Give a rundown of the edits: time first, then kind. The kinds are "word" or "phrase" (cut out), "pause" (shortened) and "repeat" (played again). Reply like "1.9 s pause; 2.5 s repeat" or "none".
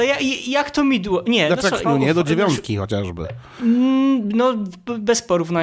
1.8 s word